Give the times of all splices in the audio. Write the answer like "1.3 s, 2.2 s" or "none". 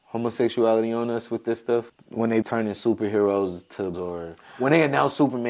1.9 s, 2.4 s, 3.9 s